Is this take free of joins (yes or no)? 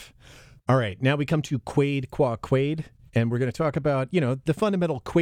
yes